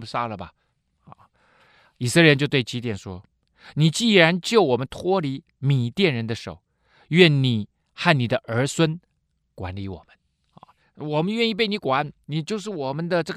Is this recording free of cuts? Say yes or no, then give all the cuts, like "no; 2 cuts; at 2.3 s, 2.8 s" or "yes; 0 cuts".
yes; 0 cuts